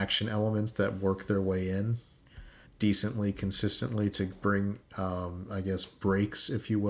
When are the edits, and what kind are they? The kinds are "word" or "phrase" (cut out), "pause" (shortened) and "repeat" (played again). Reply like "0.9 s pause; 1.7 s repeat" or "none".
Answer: 2.7 s pause; 4.8 s word